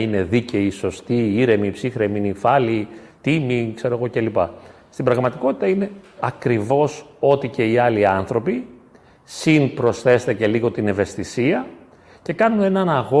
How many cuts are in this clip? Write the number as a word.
zero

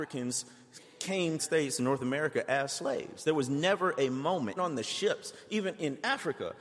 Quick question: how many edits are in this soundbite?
two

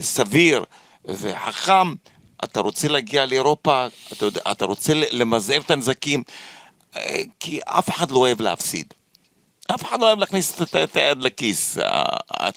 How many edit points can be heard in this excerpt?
zero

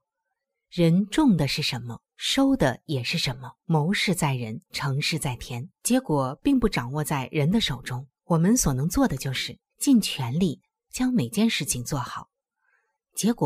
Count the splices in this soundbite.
six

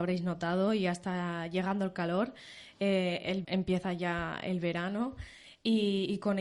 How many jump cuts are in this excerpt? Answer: one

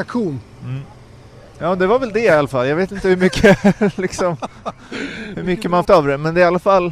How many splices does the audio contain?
one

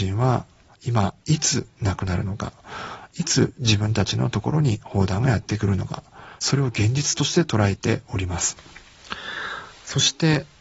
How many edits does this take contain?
one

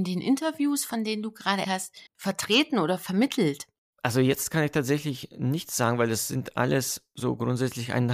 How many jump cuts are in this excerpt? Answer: two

